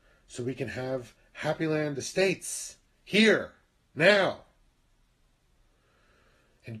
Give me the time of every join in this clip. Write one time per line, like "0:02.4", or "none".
none